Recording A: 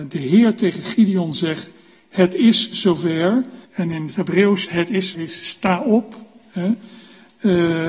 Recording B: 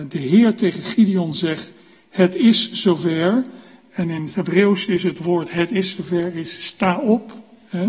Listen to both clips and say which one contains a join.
A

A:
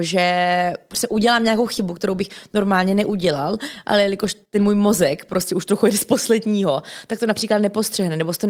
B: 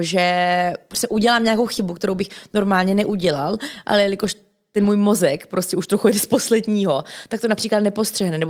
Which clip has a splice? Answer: A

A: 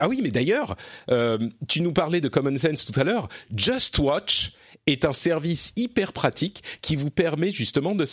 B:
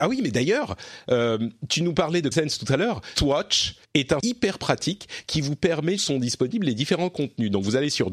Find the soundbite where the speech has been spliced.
B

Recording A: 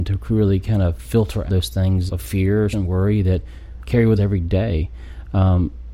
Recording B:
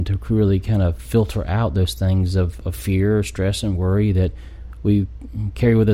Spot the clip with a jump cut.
A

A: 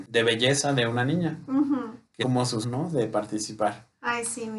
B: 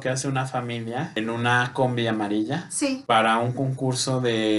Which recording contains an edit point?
A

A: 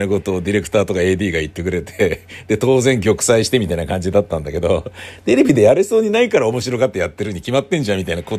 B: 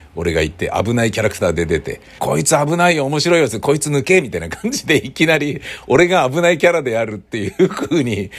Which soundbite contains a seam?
B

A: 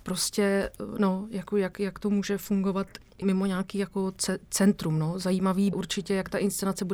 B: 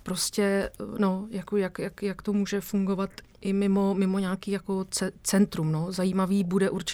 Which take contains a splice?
A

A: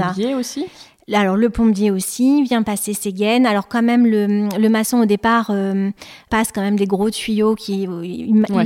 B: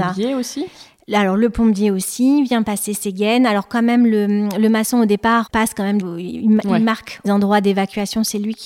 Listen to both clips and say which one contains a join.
B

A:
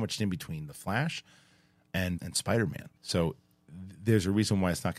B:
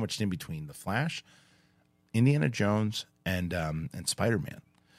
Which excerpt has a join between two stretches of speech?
A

